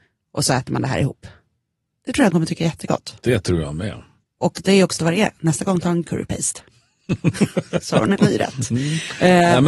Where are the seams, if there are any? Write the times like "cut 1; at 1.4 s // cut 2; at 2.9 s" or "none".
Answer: cut 1; at 2.3 s // cut 2; at 5.0 s // cut 3; at 6.0 s // cut 4; at 8.2 s